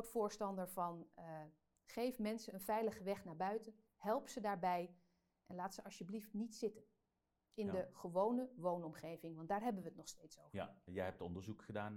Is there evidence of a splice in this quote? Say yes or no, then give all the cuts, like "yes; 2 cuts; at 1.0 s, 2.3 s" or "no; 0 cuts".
no; 0 cuts